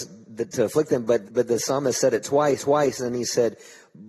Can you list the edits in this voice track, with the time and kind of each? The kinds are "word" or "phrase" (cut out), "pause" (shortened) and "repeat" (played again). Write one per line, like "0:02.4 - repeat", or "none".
0:01.2 - word
0:02.6 - repeat